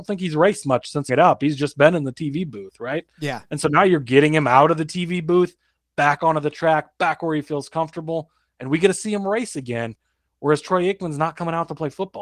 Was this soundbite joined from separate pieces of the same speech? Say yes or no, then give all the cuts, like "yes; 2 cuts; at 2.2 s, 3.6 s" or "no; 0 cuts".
yes; 1 cut; at 1.1 s